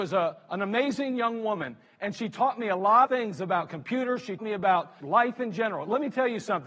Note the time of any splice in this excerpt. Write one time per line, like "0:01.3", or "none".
0:03.1
0:04.4
0:05.0

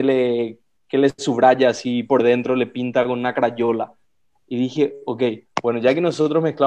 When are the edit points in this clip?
none

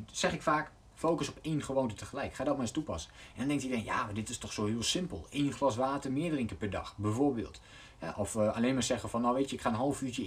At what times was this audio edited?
none

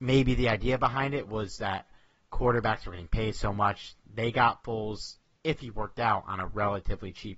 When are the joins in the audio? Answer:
none

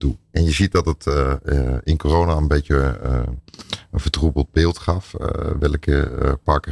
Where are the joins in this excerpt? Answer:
none

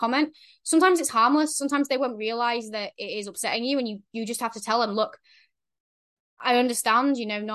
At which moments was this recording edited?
none

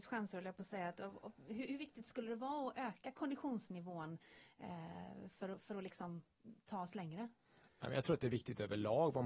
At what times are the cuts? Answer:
none

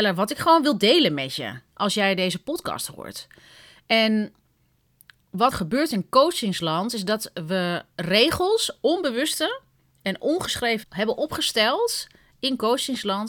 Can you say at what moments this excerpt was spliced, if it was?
0:05.5
0:07.9
0:10.8

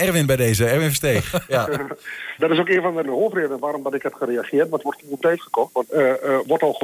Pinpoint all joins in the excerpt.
0:02.4
0:03.0
0:04.8
0:05.2
0:05.9

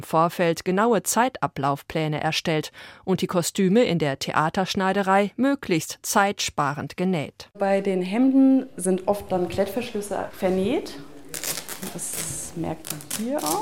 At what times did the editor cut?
none

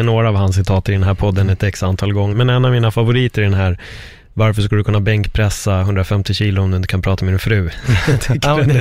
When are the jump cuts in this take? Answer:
0:02.3

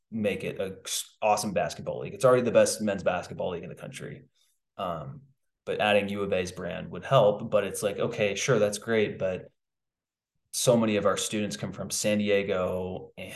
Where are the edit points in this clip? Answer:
none

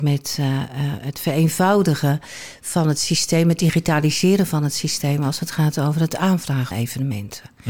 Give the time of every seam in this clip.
0:06.7

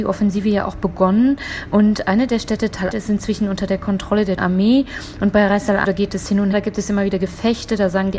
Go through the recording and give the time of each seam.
0:02.9
0:04.4
0:05.8
0:06.5

